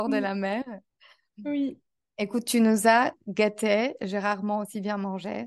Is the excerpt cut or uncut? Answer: uncut